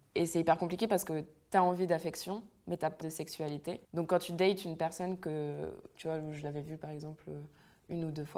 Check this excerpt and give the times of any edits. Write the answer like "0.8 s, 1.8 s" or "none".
3.0 s, 3.8 s